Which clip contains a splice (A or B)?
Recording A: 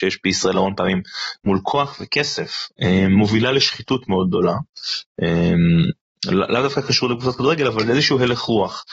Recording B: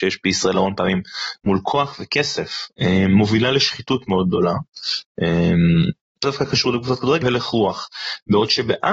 B